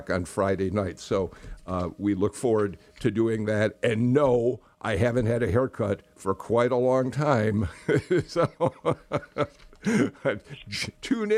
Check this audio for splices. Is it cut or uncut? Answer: uncut